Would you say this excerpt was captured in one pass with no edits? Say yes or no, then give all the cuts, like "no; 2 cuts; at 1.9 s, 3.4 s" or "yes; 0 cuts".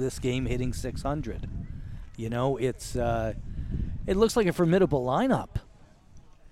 yes; 0 cuts